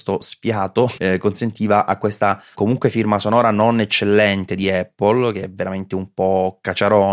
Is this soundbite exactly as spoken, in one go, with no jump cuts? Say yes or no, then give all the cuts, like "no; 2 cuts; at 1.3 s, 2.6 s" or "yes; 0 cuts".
no; 2 cuts; at 1.0 s, 2.5 s